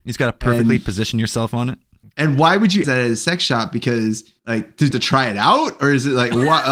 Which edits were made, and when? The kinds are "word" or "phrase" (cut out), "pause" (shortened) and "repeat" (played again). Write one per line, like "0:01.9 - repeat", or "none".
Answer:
0:02.0 - pause
0:02.8 - word
0:04.4 - pause
0:04.9 - phrase

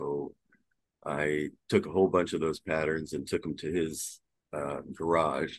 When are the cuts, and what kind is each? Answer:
0:01.6 - pause
0:04.4 - pause

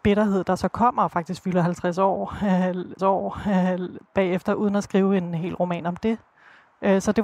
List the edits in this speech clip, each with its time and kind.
0:03.0 - repeat

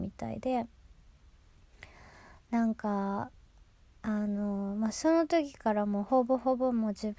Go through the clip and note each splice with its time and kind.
none

